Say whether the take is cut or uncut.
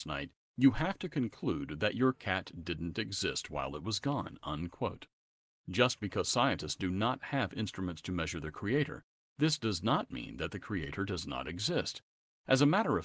uncut